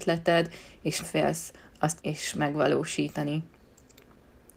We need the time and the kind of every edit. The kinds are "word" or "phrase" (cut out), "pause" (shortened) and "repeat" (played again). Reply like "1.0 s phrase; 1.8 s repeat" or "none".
1.0 s word; 2.0 s word